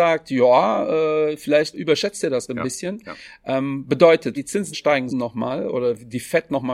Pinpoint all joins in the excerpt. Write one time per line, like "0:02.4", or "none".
0:01.7
0:02.5
0:04.4
0:04.7
0:05.1